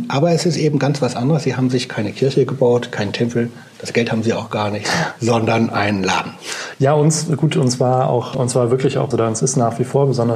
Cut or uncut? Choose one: cut